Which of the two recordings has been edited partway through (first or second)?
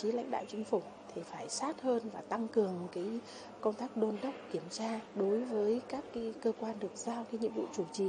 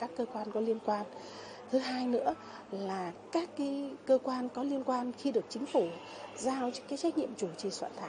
first